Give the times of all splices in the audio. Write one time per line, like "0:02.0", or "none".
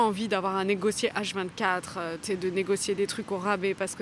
none